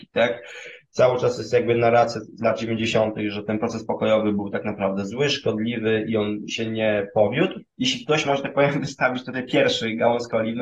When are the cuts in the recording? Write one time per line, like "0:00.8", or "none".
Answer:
none